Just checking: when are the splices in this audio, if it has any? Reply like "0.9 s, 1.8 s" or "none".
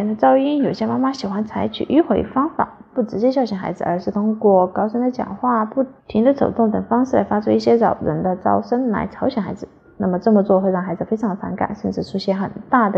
6.0 s